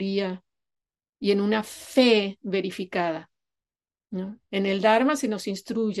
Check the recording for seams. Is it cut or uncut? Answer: uncut